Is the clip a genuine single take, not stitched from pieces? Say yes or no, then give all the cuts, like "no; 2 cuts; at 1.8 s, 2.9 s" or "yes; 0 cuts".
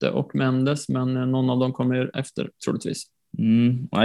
no; 1 cut; at 2.1 s